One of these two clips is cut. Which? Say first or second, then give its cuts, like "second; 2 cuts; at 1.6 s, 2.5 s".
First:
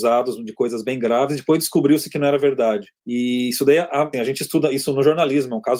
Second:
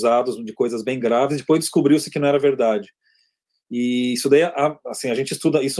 first; 2 cuts; at 3.0 s, 4.1 s